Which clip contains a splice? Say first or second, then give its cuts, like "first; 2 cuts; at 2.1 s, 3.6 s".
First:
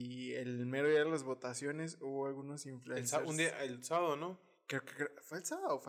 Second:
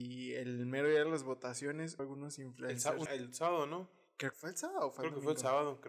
second; 3 cuts; at 2.0 s, 3.1 s, 4.3 s